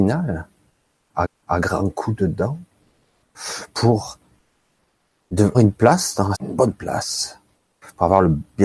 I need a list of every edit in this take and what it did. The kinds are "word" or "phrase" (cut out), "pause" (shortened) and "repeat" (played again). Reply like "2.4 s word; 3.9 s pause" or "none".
1.2 s repeat; 5.5 s word; 6.3 s word